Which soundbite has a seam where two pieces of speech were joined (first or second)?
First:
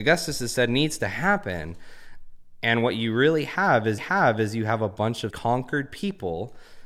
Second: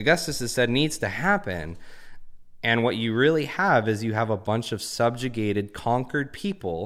first